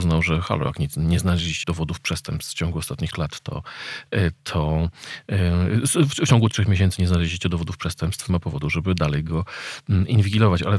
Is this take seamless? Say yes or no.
no